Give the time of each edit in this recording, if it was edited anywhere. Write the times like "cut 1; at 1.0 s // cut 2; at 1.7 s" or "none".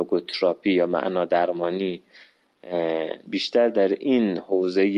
cut 1; at 3.3 s